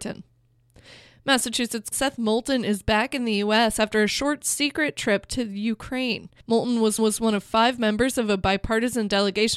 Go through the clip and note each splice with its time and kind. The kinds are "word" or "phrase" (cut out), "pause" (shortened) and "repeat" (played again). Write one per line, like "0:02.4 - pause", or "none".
0:01.9 - word
0:06.4 - pause
0:07.0 - repeat